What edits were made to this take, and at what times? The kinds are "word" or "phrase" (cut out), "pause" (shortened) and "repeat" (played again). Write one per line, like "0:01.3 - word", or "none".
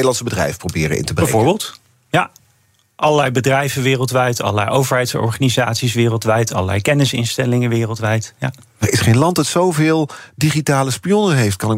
none